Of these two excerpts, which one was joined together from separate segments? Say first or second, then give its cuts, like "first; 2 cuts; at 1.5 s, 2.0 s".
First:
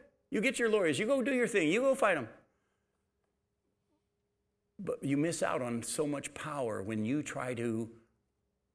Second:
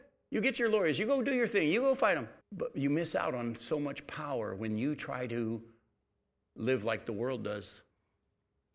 second; 1 cut; at 2.4 s